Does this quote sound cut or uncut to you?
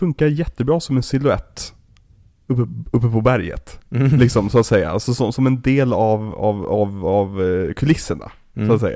uncut